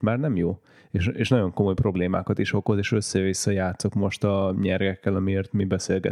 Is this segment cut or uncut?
uncut